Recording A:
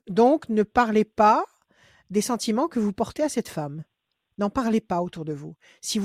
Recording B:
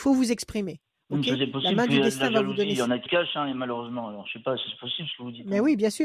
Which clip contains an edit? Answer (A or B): B